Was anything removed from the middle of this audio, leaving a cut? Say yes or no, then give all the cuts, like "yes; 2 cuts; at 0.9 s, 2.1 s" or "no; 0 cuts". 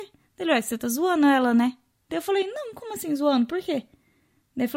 no; 0 cuts